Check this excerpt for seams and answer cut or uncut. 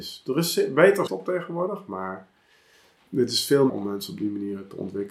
cut